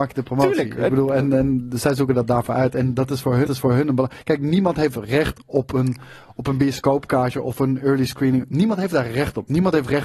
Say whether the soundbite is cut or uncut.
cut